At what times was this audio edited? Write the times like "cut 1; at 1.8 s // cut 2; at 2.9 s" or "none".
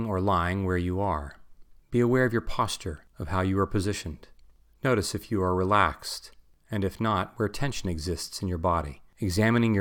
none